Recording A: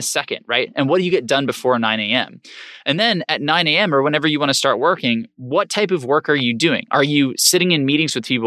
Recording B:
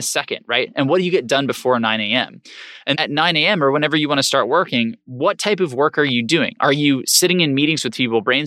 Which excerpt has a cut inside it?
B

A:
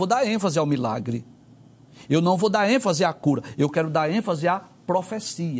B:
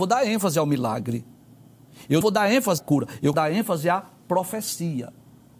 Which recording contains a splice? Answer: B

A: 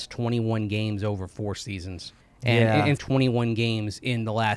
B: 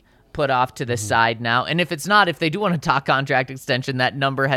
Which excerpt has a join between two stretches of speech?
A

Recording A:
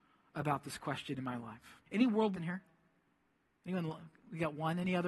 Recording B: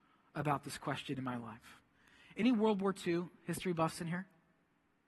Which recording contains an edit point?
A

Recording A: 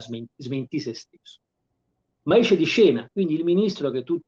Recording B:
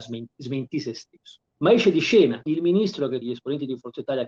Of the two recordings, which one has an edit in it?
B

